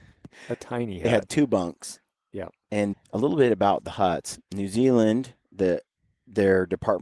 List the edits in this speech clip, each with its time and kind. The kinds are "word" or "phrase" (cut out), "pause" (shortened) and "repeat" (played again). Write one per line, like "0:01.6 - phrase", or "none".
0:02.9 - word